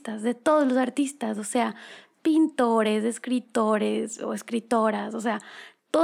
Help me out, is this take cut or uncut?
uncut